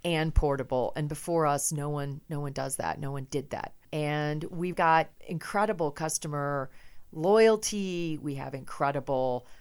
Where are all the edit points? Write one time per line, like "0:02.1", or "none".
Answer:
0:04.7